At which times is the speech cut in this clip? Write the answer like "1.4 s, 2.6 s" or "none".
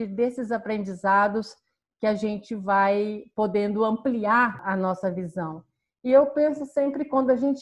none